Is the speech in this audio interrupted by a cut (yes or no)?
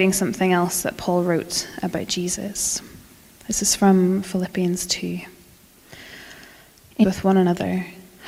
yes